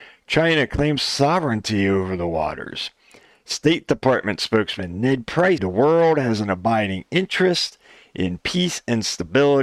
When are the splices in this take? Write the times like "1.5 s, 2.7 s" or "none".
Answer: 5.6 s